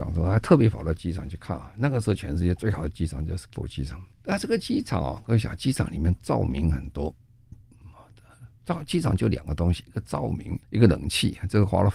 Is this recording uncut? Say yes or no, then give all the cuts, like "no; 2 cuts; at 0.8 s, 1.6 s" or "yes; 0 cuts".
no; 3 cuts; at 3.6 s, 4.1 s, 10.6 s